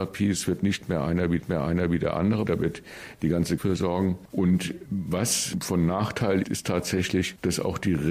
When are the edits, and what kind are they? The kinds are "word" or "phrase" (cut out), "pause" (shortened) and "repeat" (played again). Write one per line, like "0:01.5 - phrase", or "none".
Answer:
0:01.4 - repeat
0:02.5 - word
0:03.6 - word
0:06.4 - word

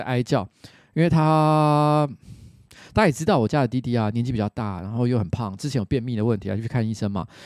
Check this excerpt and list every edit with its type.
none

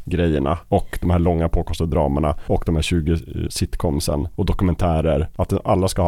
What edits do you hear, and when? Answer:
0:03.5 - word

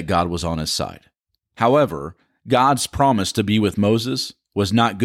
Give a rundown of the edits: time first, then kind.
none

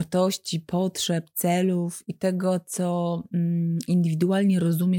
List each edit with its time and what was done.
none

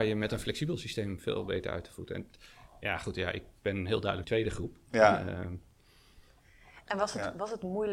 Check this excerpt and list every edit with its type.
0:04.2 - phrase

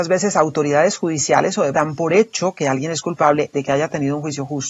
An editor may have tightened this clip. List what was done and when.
0:01.7 - word
0:03.5 - word

